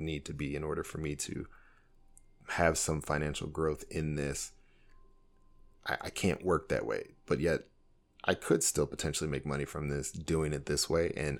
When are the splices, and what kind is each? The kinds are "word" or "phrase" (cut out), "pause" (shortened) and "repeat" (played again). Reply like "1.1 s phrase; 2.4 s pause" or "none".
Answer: none